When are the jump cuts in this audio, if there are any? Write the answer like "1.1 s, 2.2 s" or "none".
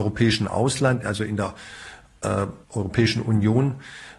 2.6 s